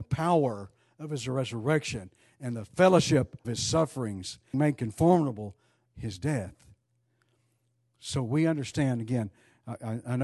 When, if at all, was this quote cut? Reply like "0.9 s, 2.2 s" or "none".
3.4 s, 4.5 s, 5.9 s